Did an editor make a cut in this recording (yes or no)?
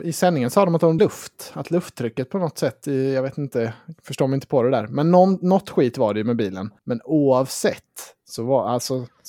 yes